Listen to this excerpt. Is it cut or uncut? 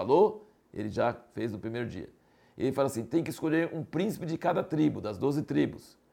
uncut